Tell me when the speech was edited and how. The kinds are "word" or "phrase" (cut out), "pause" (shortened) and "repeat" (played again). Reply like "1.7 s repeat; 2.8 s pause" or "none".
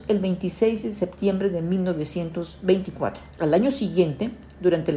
3.3 s pause

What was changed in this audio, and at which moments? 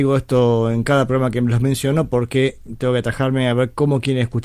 none

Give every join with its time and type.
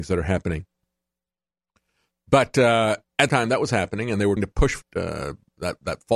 3.3 s word; 4.4 s word; 4.8 s word

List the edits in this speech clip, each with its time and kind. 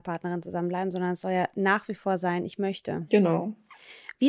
none

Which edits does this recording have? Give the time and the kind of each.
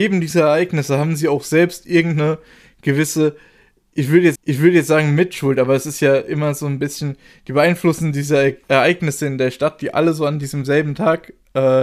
4.4 s repeat; 8.6 s pause

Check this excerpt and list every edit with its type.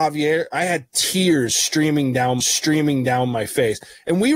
2.4 s repeat

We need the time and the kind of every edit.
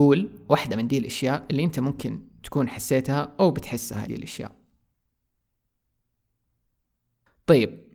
4.1 s phrase

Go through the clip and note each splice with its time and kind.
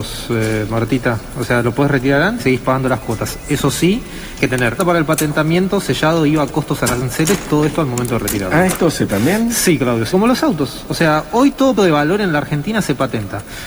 2.4 s word; 4.4 s word; 4.8 s word; 9.1 s word; 10.1 s word; 11.8 s word

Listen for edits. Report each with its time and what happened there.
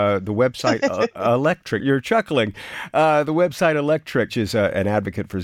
1.8 s word; 4.3 s word

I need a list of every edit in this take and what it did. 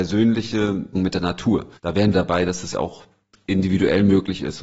0.9 s word; 1.8 s pause; 2.1 s phrase; 2.7 s word; 3.3 s pause

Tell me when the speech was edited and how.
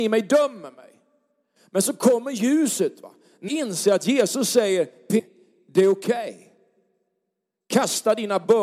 3.5 s word; 5.2 s word

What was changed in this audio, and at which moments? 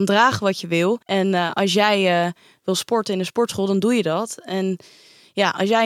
1.0 s pause

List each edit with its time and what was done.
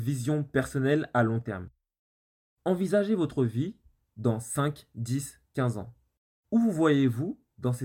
none

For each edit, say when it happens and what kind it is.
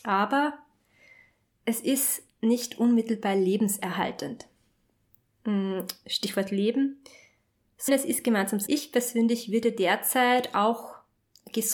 7.9 s word; 8.7 s word

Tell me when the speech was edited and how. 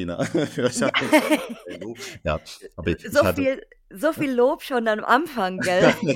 none

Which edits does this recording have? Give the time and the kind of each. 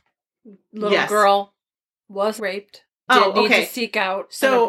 2.4 s word; 3.1 s word

